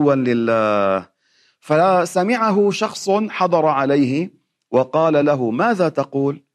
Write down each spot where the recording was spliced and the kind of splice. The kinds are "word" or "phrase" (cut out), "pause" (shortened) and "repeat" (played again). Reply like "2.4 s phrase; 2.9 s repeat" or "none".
none

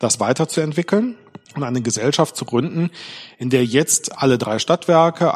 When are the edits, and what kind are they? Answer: 1.4 s pause

